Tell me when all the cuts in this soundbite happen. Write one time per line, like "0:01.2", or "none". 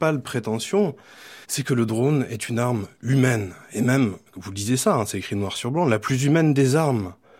0:01.4
0:04.3